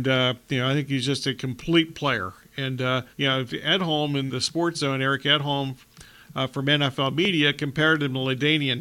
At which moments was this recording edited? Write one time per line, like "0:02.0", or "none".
0:03.1
0:03.5
0:04.3